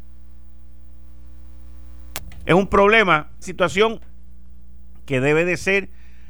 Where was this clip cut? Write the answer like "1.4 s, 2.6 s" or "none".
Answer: 3.4 s